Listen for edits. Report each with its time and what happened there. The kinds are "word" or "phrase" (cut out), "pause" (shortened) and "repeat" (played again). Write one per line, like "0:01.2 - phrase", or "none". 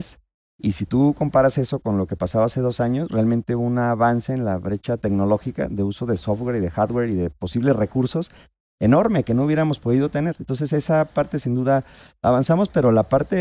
none